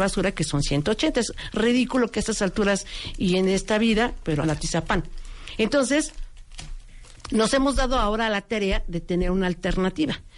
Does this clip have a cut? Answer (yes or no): yes